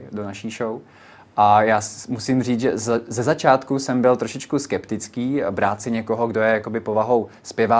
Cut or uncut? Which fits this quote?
uncut